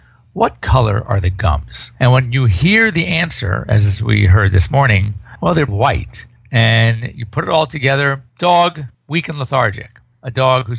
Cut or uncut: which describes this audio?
cut